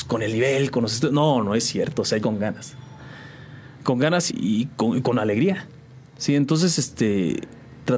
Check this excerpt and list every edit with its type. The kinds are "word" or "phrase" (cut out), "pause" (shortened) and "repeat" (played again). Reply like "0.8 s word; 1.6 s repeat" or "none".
2.2 s word; 4.3 s word